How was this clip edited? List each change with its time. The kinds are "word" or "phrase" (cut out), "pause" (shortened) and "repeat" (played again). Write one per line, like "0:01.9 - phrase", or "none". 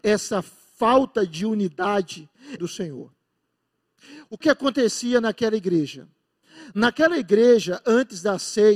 0:02.6 - phrase
0:04.4 - word